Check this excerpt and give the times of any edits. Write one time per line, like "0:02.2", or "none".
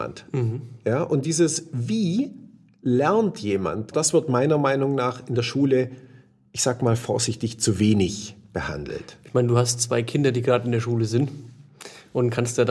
0:03.9